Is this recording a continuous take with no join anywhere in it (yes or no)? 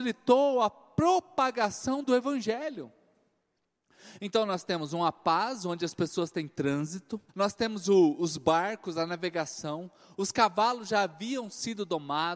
no